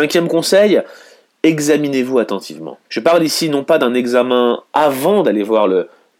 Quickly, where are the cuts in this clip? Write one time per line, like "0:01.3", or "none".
0:02.8